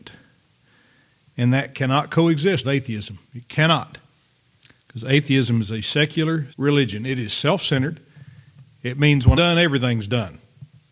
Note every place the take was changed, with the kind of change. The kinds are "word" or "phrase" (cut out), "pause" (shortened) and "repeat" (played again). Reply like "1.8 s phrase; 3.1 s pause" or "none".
2.6 s word; 3.2 s pause; 6.5 s word; 9.3 s word